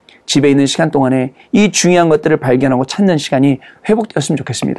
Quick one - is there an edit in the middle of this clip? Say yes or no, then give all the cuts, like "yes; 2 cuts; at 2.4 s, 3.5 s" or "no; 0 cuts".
no; 0 cuts